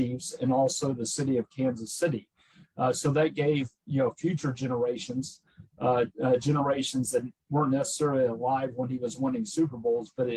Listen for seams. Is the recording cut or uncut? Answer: uncut